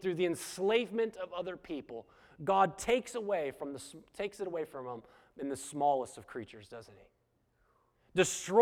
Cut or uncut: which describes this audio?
uncut